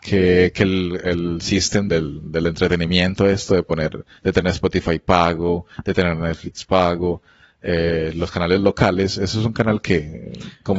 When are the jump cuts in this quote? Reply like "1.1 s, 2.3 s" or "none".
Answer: 1.9 s